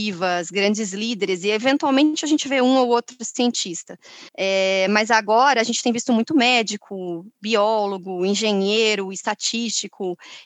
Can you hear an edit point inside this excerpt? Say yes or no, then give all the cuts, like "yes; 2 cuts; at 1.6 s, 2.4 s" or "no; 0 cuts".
yes; 1 cut; at 4.3 s